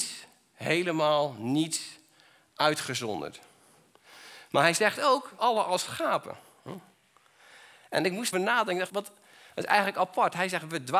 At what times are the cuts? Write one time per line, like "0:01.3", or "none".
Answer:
0:05.4
0:08.3
0:08.9